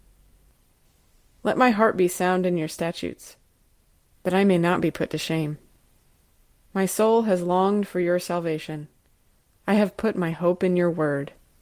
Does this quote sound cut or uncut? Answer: uncut